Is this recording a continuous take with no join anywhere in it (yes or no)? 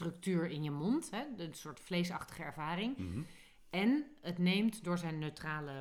yes